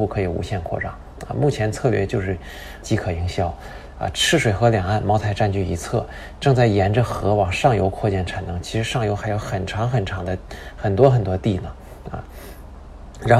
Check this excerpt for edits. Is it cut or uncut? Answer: cut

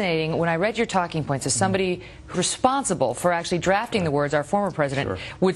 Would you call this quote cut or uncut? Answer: cut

